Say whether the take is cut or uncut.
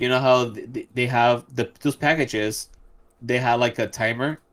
uncut